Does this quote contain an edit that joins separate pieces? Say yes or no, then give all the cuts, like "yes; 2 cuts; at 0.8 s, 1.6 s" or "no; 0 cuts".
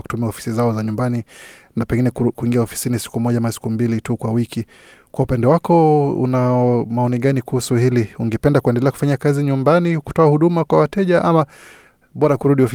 no; 0 cuts